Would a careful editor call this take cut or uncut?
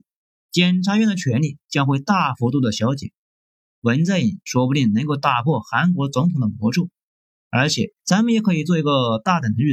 cut